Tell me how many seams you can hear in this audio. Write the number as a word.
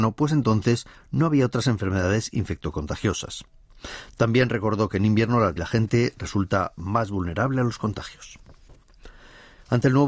one